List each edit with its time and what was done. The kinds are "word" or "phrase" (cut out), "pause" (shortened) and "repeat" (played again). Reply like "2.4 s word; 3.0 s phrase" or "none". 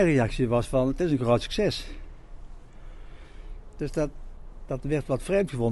none